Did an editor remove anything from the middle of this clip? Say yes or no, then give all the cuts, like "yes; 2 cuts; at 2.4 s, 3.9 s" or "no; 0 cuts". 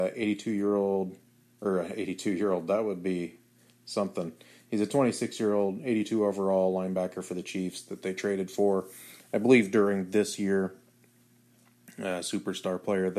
no; 0 cuts